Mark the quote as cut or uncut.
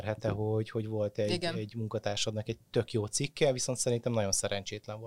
uncut